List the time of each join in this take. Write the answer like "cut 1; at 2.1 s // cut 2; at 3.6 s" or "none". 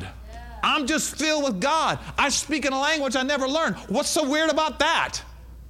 none